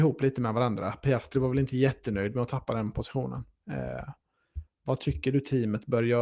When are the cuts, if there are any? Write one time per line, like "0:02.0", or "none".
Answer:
none